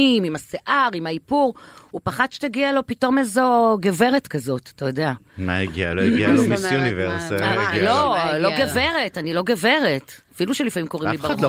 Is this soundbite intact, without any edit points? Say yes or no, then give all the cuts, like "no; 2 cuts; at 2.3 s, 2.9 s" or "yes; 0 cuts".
yes; 0 cuts